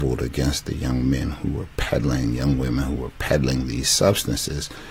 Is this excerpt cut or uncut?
uncut